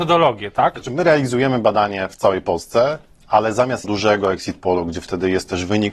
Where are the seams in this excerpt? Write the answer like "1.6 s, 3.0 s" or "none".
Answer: 3.8 s

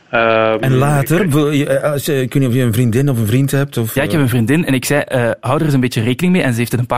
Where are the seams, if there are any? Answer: none

